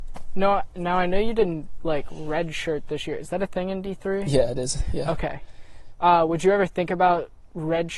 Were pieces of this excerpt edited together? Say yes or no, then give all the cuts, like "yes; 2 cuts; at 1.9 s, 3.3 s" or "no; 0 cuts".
no; 0 cuts